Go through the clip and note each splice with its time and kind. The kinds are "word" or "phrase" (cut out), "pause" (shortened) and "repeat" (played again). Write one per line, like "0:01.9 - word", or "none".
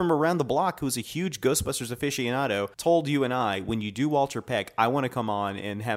0:02.7 - pause

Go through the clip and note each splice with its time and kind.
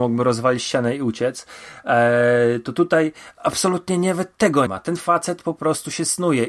0:04.7 - word

